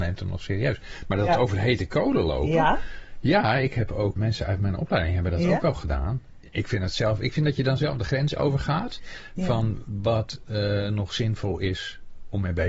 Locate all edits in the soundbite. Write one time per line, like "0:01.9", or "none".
0:04.2